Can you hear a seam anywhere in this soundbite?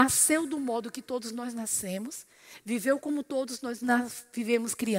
no; 0 cuts

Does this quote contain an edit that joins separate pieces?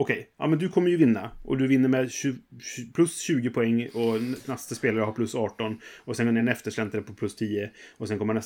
no; 0 cuts

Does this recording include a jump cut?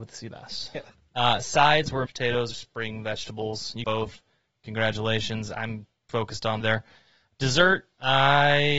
yes; 5 cuts; at 2.1 s, 2.5 s, 3.8 s, 6.1 s, 6.6 s

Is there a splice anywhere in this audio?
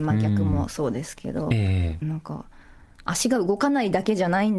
yes; 1 cut; at 2.0 s

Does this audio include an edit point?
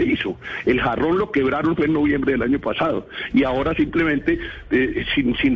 no; 0 cuts

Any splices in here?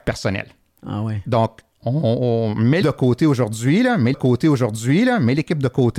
yes; 2 cuts; at 2.8 s, 4.1 s

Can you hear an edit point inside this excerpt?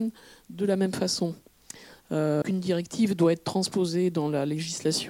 yes; 1 cut; at 2.4 s

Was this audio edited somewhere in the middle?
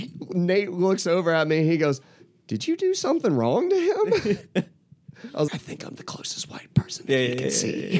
yes; 2 cuts; at 5.5 s, 6.0 s

